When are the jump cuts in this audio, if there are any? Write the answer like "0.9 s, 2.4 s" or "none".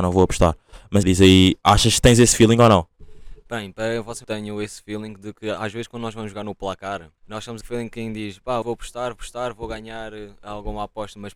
1.0 s, 4.2 s, 7.2 s, 7.6 s, 8.6 s, 9.2 s